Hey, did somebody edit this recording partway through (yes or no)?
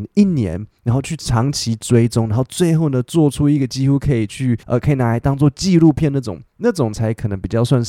yes